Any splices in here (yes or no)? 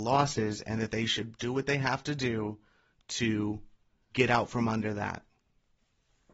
yes